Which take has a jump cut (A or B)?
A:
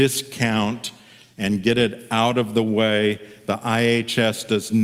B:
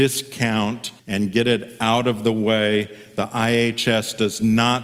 B